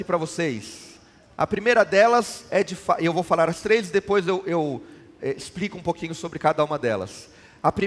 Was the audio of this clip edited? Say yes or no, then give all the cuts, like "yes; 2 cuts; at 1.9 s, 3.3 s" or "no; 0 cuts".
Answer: no; 0 cuts